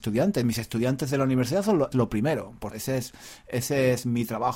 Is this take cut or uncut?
cut